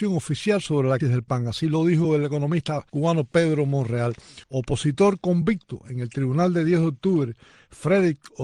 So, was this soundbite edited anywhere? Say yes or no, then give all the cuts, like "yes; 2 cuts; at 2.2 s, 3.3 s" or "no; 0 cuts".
yes; 3 cuts; at 1.0 s, 2.9 s, 4.4 s